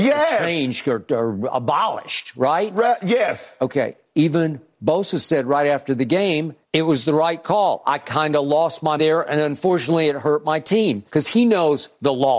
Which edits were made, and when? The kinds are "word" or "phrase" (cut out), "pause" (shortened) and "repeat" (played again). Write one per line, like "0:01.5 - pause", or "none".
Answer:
0:06.6 - pause
0:09.0 - word
0:11.1 - pause